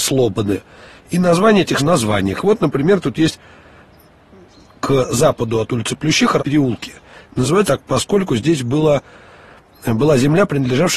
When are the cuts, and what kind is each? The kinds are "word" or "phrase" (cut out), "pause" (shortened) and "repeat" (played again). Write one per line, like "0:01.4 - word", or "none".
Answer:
0:01.8 - phrase
0:06.4 - word
0:07.7 - word